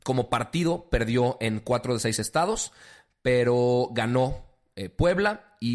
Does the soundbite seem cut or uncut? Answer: uncut